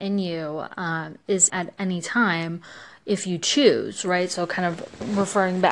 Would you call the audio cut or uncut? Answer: cut